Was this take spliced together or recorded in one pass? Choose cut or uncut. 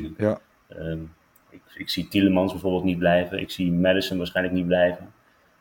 uncut